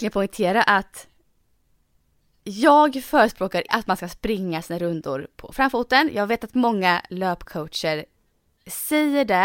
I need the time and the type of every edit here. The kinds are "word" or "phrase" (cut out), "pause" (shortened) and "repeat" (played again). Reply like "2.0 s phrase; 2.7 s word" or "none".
3.7 s word